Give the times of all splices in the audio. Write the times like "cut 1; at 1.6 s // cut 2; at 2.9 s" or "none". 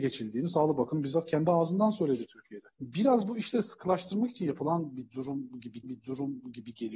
cut 1; at 2.7 s // cut 2; at 5.8 s